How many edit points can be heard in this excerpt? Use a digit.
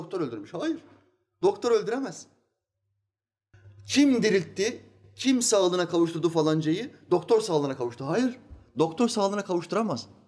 0